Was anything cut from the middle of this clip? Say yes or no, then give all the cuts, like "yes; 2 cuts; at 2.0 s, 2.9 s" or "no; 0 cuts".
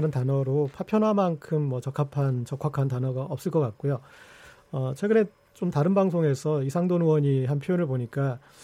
no; 0 cuts